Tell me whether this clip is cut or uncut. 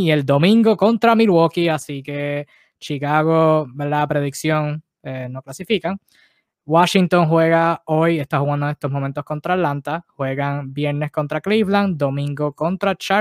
uncut